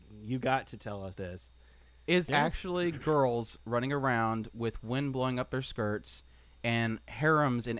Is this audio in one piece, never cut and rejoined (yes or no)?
no